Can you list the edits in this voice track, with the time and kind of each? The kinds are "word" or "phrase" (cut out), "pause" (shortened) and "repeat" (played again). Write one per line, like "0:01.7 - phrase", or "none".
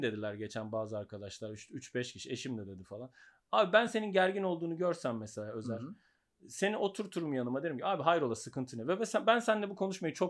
none